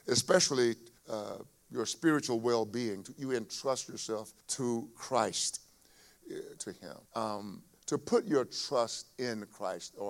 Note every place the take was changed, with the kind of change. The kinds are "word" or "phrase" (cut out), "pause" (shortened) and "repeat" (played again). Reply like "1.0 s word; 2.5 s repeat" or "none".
1.0 s pause; 4.4 s pause; 6.6 s phrase; 7.1 s pause